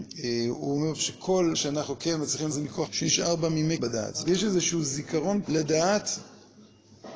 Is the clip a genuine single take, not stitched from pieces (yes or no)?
no